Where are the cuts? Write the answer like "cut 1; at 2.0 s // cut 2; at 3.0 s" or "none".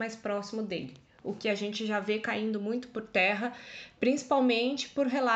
none